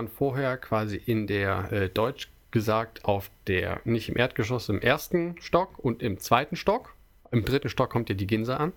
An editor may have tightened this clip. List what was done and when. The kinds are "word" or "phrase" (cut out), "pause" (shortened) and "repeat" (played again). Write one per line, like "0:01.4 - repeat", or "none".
none